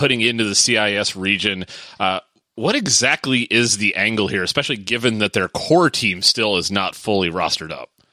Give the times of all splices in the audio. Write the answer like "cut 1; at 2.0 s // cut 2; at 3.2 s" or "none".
none